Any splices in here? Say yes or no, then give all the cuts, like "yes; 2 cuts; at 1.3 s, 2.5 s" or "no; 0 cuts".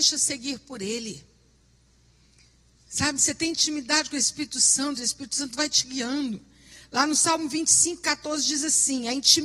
no; 0 cuts